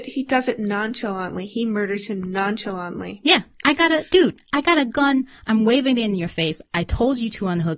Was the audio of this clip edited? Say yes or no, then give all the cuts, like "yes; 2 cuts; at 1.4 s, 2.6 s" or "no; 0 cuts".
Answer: no; 0 cuts